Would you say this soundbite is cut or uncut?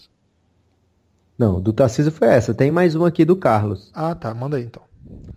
uncut